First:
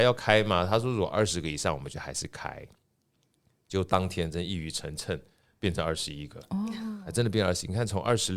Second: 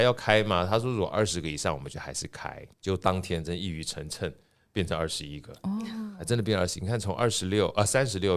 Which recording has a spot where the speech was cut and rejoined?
second; 1 cut; at 2.7 s

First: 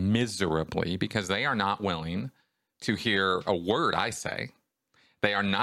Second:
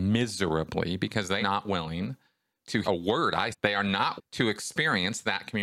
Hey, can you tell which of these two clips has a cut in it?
second; 4 cuts; at 1.4 s, 2.8 s, 3.5 s, 4.2 s

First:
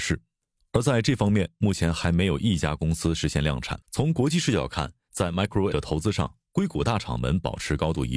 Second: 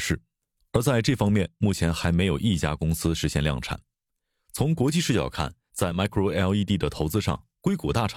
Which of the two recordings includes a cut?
first; 2 cuts; at 3.8 s, 5.7 s

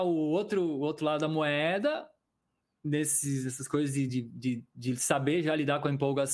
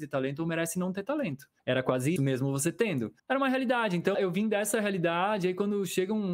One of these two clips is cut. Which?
second; 4 cuts; at 1.6 s, 2.2 s, 3.2 s, 4.1 s

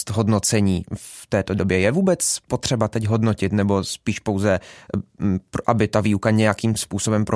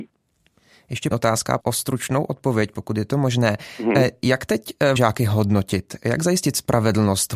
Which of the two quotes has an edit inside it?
second; 3 cuts; at 1.1 s, 1.6 s, 5.0 s

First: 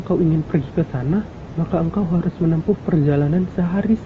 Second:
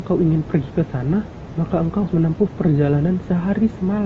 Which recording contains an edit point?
second; 1 cut; at 2.1 s

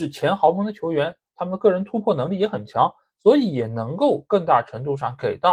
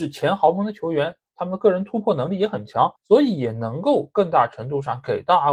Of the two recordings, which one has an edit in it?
second; 1 cut; at 3.0 s

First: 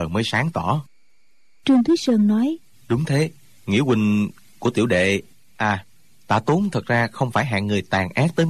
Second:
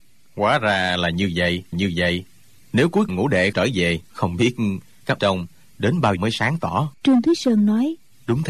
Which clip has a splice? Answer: second; 7 cuts; at 1.7 s, 3.1 s, 3.5 s, 4.0 s, 5.2 s, 6.2 s, 7.0 s

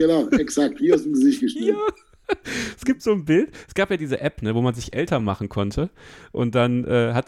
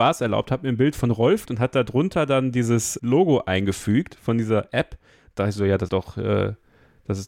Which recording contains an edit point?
second; 3 cuts; at 1.5 s, 3.0 s, 5.9 s

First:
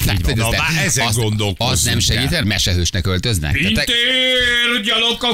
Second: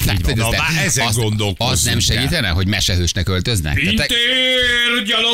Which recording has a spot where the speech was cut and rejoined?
first; 1 cut; at 2.4 s

